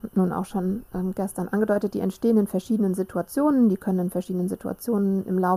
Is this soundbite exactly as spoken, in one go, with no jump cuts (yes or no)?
yes